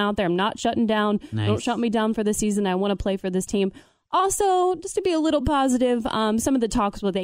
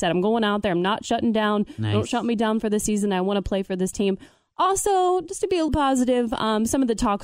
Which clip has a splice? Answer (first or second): second